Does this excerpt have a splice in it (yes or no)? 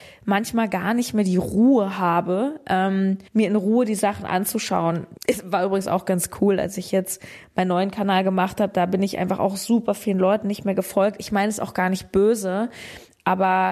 yes